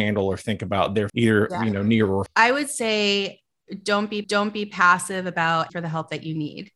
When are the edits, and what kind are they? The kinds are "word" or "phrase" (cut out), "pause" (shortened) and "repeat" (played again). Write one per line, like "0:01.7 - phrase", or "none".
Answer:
0:01.1 - word
0:02.3 - word
0:04.2 - repeat
0:05.7 - word